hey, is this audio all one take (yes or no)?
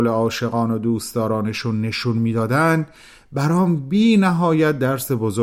yes